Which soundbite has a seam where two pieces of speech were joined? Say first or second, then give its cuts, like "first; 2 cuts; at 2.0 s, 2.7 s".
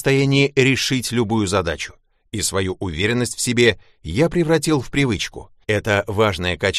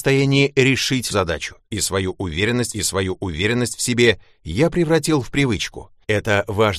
second; 3 cuts; at 1.1 s, 1.6 s, 2.7 s